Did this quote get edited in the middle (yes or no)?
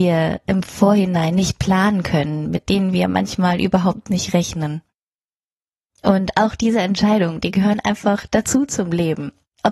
no